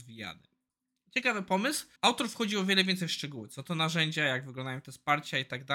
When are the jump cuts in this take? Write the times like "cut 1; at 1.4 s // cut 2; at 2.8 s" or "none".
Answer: cut 1; at 2.0 s